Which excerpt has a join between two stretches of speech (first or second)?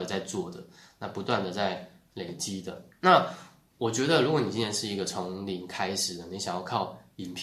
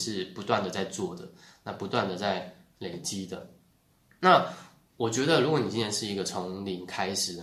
first